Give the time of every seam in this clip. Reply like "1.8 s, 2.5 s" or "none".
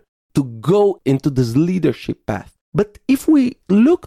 2.6 s